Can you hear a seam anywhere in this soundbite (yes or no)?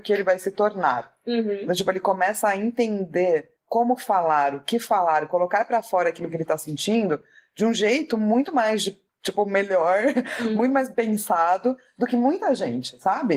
no